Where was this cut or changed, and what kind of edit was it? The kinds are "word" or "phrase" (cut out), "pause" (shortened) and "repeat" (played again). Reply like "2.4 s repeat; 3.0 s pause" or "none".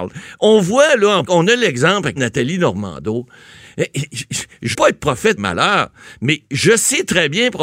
1.2 s word; 2.2 s word; 4.7 s word; 5.4 s word

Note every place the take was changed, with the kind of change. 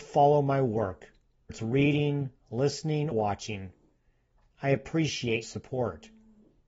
1.5 s word; 3.1 s word; 5.4 s word

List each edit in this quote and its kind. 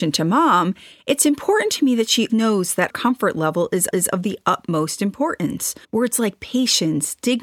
2.3 s word; 2.9 s word; 3.9 s repeat; 5.8 s pause

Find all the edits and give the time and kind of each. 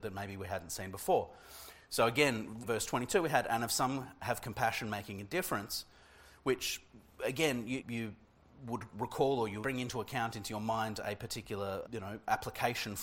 2.6 s word; 7.8 s word; 9.6 s word; 11.9 s word

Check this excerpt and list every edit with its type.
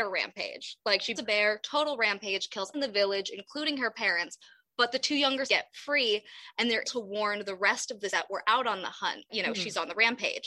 1.2 s word; 2.7 s word; 5.5 s word; 6.8 s word; 8.1 s word; 9.3 s word

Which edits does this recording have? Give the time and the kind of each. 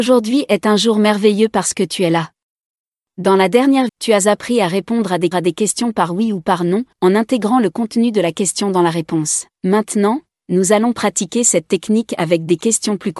2.9 s pause; 3.9 s word; 5.3 s repeat; 6.9 s pause; 9.6 s pause

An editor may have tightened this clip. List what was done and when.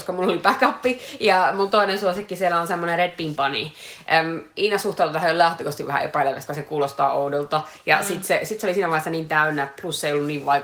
3.4 s word; 6.5 s word

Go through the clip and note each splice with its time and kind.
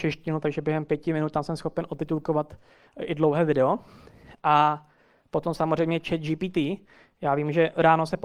none

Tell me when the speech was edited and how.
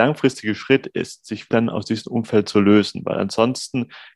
1.5 s word

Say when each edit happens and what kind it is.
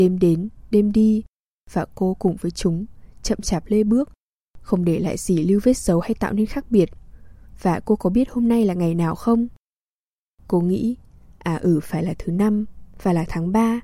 none

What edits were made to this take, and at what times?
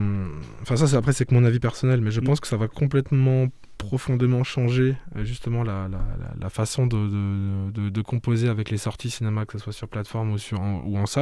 none

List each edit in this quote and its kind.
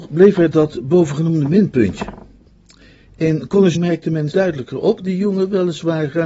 3.8 s word; 4.3 s word; 5.0 s word

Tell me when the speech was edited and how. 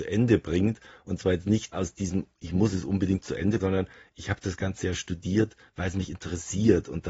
1.7 s word; 3.6 s word

